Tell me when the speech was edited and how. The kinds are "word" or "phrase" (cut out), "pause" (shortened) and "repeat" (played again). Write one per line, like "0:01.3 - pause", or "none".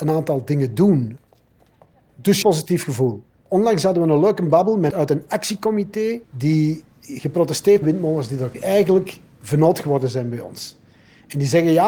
0:02.4 - phrase
0:04.9 - word
0:06.2 - pause
0:07.8 - phrase
0:08.5 - phrase